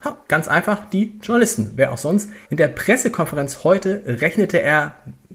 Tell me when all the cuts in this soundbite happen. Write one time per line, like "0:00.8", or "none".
0:02.4